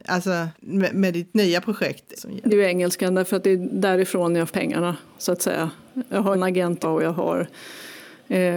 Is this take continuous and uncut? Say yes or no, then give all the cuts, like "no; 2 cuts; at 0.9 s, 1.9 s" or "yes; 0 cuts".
no; 6 cuts; at 0.9 s, 2.1 s, 2.5 s, 4.5 s, 6.3 s, 6.8 s